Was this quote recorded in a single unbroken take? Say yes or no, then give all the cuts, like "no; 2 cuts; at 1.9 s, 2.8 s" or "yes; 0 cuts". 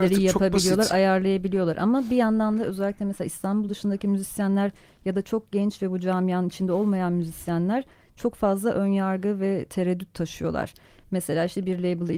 yes; 0 cuts